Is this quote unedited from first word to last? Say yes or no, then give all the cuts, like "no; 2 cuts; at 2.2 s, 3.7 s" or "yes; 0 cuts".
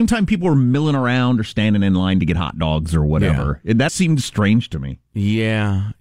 no; 1 cut; at 3.9 s